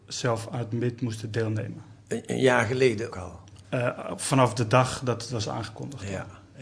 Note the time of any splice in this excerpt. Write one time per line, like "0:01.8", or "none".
0:03.1
0:03.6